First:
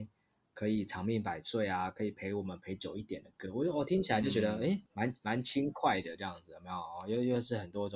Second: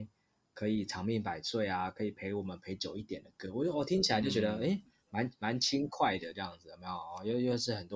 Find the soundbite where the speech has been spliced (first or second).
first